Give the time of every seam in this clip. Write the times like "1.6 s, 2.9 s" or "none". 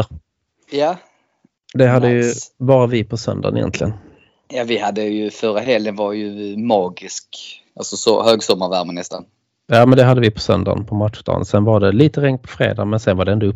none